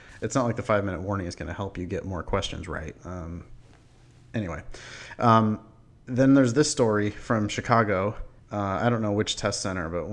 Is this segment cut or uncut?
cut